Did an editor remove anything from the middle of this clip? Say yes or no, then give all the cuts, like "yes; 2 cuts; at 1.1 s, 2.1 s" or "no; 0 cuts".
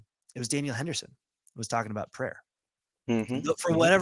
no; 0 cuts